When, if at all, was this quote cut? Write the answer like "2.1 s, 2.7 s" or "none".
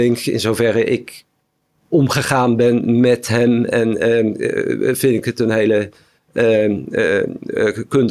none